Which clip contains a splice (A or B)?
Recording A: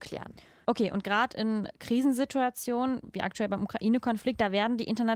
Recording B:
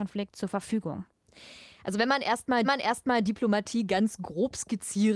B